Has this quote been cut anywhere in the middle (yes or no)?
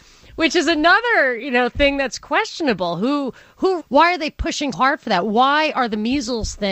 yes